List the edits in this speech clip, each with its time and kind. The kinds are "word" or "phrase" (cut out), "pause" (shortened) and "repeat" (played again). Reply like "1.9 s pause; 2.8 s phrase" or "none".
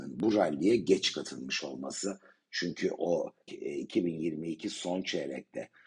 3.5 s word